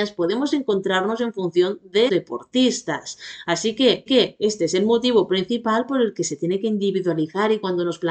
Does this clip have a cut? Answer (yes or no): yes